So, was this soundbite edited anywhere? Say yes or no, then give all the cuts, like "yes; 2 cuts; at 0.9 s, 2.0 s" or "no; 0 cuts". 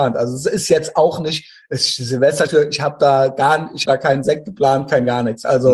yes; 2 cuts; at 2.5 s, 3.8 s